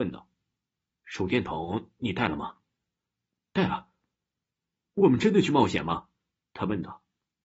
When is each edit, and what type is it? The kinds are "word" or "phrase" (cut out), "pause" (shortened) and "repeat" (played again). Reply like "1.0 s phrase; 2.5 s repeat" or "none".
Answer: none